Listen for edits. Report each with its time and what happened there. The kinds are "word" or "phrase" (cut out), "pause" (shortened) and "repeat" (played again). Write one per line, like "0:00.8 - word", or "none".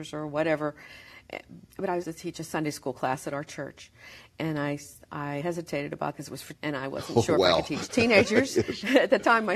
0:01.7 - pause
0:02.0 - word
0:05.4 - word
0:06.1 - word
0:06.6 - word